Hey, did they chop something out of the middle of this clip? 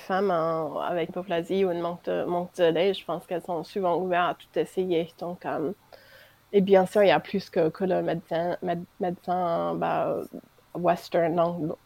yes; 1 cut; at 1.1 s

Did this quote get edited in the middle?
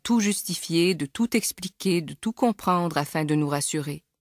no; 0 cuts

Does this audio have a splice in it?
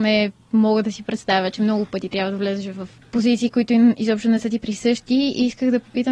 no; 0 cuts

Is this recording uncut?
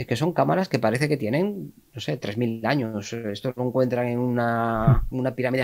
yes; 0 cuts

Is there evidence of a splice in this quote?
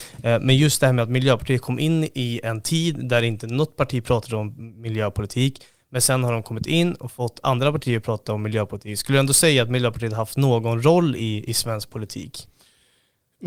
no; 0 cuts

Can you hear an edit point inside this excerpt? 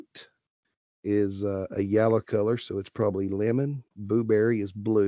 yes; 1 cut; at 3.9 s

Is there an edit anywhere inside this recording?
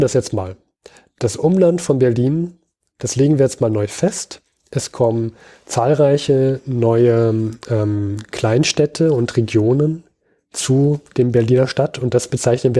no; 0 cuts

